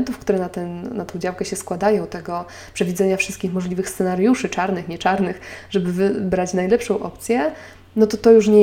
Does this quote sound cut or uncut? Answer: uncut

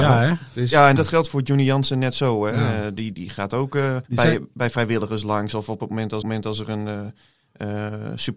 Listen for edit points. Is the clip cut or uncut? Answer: cut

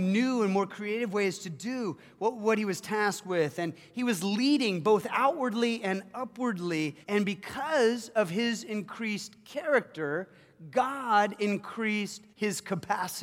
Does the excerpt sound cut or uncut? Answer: cut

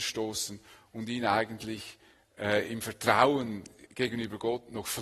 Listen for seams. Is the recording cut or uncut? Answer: uncut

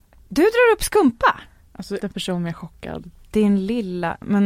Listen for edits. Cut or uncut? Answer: cut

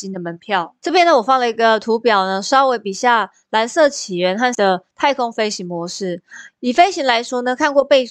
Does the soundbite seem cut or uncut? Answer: cut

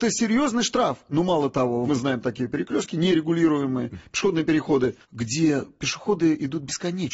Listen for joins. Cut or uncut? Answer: cut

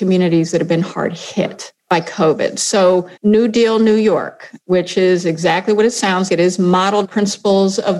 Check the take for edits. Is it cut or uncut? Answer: cut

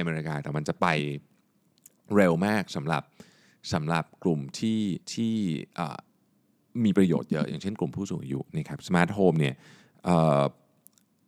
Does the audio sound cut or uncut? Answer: cut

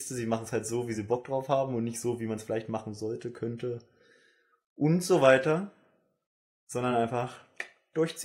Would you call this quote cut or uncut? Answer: uncut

